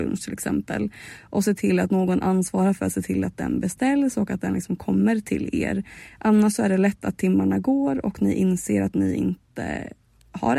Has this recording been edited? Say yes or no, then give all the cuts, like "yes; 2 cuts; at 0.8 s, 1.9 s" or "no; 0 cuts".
no; 0 cuts